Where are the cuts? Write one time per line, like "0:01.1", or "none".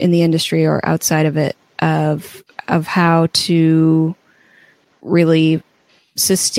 none